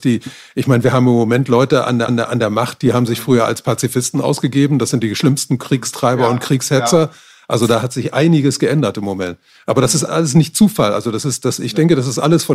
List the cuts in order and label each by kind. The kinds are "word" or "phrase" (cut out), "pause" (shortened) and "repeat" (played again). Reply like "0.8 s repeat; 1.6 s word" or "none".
2.1 s repeat; 10.1 s word